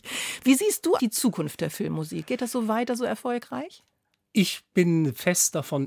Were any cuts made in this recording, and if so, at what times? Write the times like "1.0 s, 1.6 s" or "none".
1.0 s